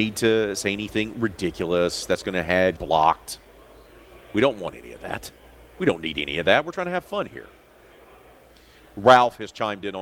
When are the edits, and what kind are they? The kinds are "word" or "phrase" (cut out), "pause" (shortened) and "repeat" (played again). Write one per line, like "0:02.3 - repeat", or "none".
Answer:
0:02.8 - word

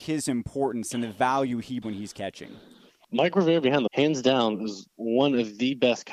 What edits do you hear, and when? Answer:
0:01.8 - word
0:03.9 - phrase

